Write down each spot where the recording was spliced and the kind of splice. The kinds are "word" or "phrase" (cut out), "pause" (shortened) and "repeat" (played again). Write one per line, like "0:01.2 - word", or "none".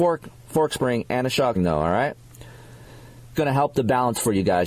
0:01.6 - word
0:03.3 - word